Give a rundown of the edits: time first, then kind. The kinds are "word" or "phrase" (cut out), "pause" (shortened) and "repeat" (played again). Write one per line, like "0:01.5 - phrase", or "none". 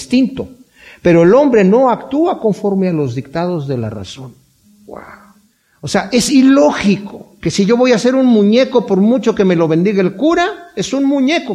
none